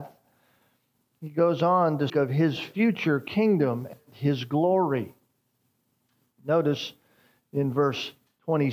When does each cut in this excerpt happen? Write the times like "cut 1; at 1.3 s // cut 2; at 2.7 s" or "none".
cut 1; at 2.1 s